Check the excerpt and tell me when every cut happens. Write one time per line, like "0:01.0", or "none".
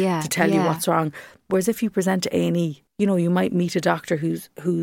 0:02.9